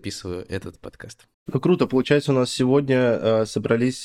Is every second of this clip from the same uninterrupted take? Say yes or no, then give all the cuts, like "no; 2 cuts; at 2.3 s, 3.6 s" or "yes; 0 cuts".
yes; 0 cuts